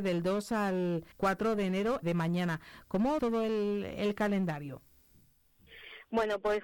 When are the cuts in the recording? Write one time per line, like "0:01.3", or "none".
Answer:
0:01.1
0:02.0
0:03.2

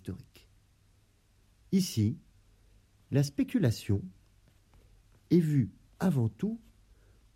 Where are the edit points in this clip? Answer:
none

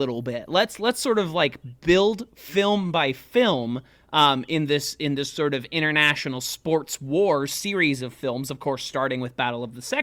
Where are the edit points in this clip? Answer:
none

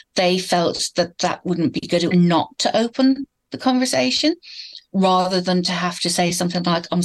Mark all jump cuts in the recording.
0:02.1

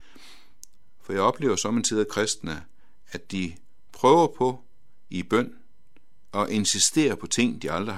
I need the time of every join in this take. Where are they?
none

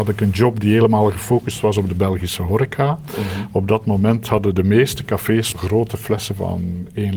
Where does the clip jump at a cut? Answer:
0:05.5

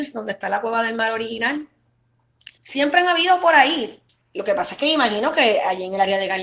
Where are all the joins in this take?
0:02.6
0:04.1

